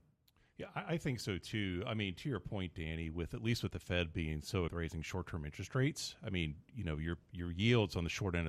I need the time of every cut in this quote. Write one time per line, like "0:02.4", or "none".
0:04.7